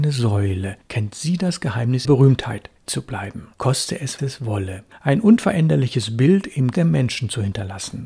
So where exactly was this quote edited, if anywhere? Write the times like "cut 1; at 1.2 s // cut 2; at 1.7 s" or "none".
cut 1; at 2.0 s // cut 2; at 2.9 s // cut 3; at 3.5 s // cut 4; at 4.2 s // cut 5; at 6.7 s